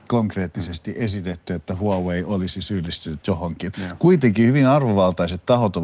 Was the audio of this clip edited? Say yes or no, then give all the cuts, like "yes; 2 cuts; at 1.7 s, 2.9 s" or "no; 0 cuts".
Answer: no; 0 cuts